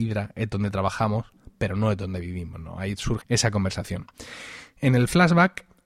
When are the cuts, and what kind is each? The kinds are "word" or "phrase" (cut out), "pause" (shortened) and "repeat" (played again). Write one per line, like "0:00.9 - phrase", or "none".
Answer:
0:03.2 - phrase